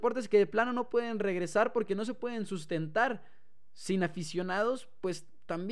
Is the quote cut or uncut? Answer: uncut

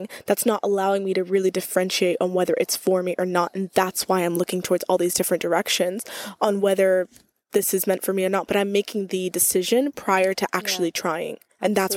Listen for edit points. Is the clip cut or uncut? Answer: uncut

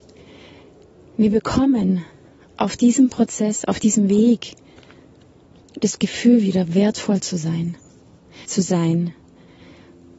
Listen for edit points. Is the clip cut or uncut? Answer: cut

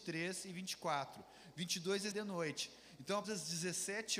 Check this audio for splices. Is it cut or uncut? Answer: cut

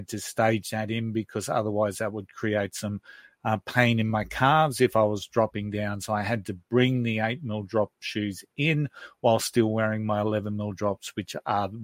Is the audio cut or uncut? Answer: uncut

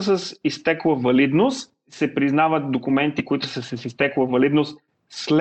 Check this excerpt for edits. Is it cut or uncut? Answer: uncut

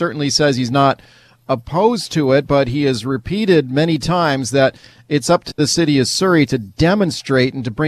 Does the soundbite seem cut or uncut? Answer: uncut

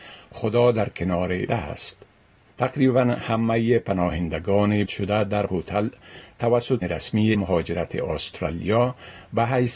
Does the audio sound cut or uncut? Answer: cut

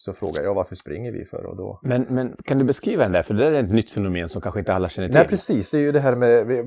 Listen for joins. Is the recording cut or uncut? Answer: uncut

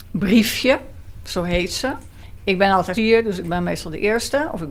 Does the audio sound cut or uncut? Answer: cut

